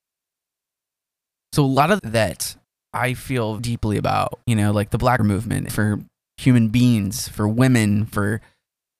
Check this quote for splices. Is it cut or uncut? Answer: cut